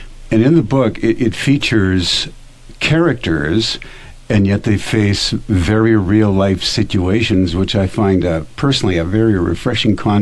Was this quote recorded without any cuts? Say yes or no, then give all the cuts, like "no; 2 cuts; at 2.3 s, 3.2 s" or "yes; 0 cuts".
yes; 0 cuts